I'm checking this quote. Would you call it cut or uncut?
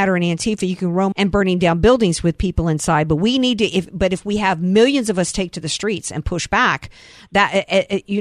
cut